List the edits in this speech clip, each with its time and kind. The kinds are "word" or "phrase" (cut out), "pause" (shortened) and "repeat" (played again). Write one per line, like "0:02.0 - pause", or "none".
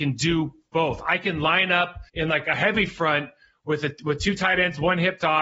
0:02.1 - pause